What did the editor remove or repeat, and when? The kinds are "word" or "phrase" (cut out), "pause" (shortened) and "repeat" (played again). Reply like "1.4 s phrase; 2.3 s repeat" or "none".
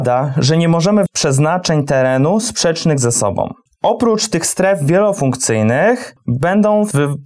1.1 s word